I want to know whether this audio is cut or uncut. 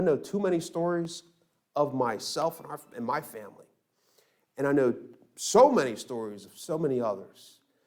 uncut